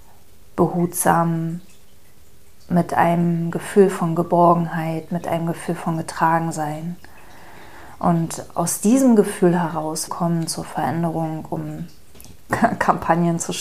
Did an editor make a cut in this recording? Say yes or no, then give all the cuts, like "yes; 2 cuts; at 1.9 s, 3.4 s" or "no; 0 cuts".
yes; 1 cut; at 10.1 s